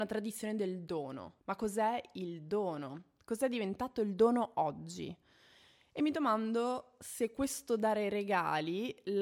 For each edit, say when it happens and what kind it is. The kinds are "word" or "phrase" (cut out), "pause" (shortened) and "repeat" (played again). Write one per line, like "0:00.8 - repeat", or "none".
0:01.4 - pause